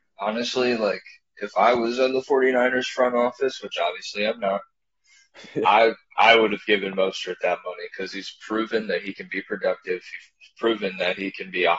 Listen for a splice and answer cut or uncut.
uncut